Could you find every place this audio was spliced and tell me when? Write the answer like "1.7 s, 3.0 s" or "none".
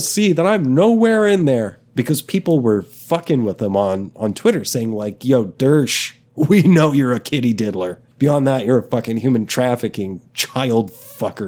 6.3 s, 8.1 s, 10.3 s